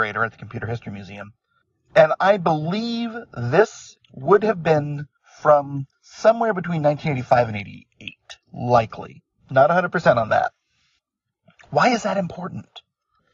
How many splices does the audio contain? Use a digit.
2